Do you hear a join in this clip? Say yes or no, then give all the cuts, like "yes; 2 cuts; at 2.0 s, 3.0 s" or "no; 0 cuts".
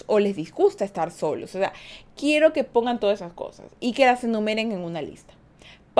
no; 0 cuts